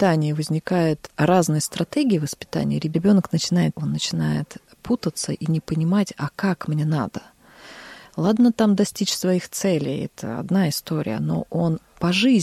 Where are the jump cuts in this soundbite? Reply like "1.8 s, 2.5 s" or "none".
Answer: 3.7 s